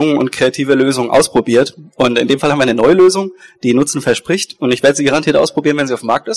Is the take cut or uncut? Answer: uncut